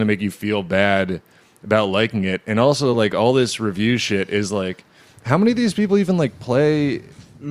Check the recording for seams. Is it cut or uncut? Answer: uncut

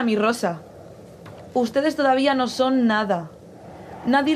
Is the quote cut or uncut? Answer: uncut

